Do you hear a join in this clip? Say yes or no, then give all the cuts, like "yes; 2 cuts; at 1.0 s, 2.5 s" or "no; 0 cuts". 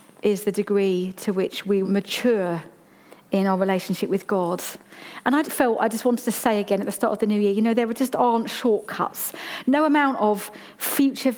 yes; 2 cuts; at 1.8 s, 5.4 s